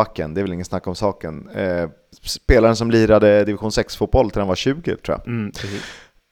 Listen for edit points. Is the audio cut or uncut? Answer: uncut